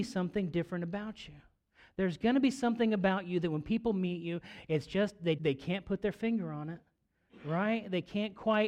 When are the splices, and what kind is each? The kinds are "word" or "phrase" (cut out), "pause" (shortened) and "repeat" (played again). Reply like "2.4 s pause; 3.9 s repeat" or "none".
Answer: 5.4 s word